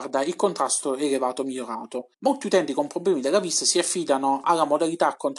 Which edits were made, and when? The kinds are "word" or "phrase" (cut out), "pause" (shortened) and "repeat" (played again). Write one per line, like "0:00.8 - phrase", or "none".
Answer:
0:02.1 - pause